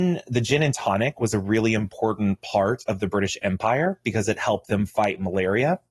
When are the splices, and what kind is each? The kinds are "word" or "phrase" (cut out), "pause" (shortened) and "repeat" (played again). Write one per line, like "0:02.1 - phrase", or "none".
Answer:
none